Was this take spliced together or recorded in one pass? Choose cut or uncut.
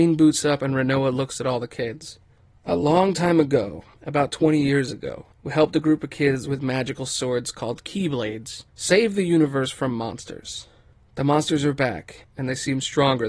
cut